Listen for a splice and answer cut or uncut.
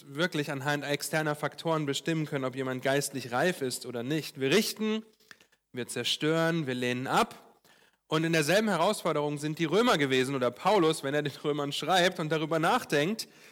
uncut